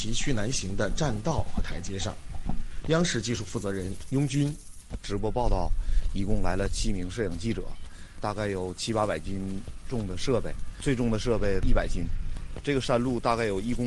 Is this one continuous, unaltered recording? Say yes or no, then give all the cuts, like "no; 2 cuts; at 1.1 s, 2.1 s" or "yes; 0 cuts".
yes; 0 cuts